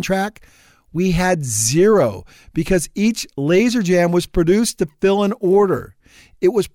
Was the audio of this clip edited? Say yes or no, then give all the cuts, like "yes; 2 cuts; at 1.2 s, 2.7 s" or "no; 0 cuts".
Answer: no; 0 cuts